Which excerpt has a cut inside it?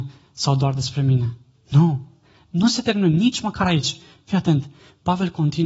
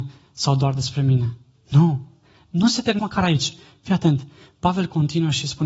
second; 1 cut; at 3.0 s

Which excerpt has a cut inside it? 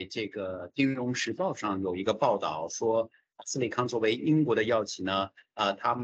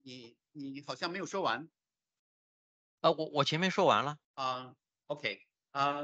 second; 1 cut; at 4.2 s

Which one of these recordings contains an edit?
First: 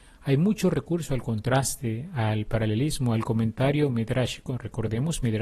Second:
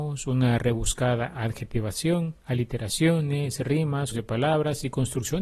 second; 2 cuts; at 2.4 s, 4.1 s

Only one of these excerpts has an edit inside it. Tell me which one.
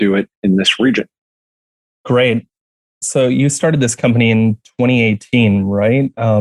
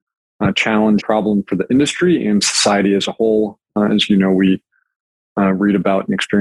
second; 1 cut; at 1.0 s

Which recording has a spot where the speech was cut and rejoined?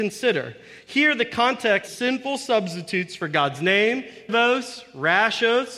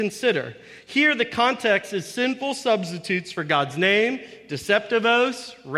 first; 2 cuts; at 1.9 s, 4.3 s

